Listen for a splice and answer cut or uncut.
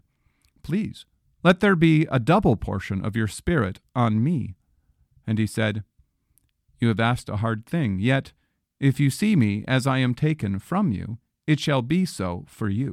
uncut